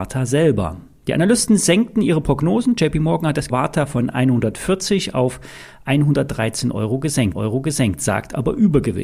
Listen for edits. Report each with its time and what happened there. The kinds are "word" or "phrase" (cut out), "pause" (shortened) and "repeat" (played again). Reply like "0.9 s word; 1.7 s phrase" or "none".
3.5 s phrase; 7.3 s repeat